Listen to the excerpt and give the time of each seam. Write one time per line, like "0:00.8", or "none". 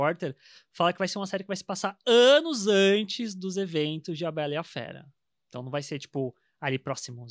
none